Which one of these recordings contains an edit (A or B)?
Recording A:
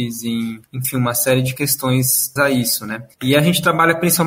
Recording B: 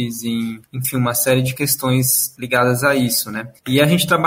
A